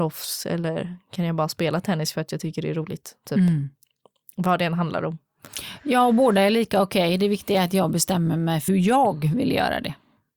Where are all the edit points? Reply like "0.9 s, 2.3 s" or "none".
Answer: 8.7 s